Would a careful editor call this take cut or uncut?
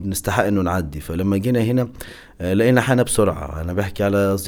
uncut